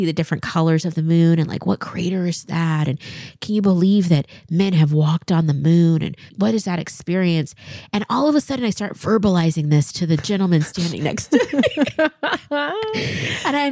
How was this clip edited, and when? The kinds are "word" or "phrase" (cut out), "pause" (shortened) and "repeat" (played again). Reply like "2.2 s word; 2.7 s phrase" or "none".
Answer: 6.3 s word